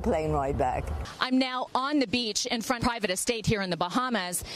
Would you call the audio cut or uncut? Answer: cut